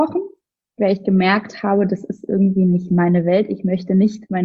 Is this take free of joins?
yes; 0 cuts

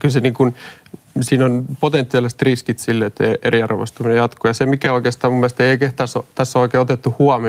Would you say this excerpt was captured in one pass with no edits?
yes; 0 cuts

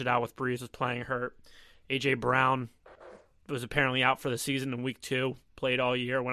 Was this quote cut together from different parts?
no; 0 cuts

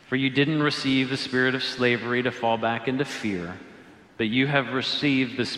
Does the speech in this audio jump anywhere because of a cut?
no; 0 cuts

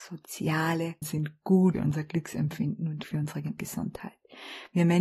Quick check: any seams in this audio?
yes; 4 cuts; at 1.0 s, 1.7 s, 3.0 s, 3.6 s

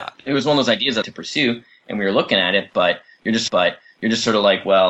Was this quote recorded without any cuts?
no; 2 cuts; at 1.0 s, 3.5 s

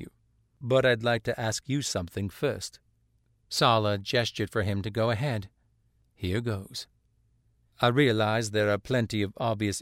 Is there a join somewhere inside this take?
no; 0 cuts

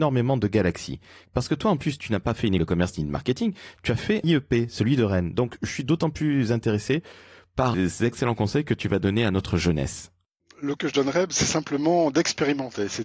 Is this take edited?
yes; 4 cuts; at 2.6 s, 4.2 s, 7.7 s, 10.8 s

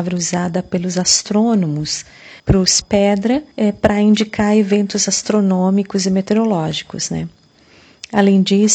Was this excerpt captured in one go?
no; 3 cuts; at 2.4 s, 2.8 s, 3.5 s

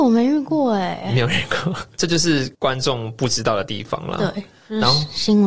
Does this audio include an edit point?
yes; 1 cut; at 2.5 s

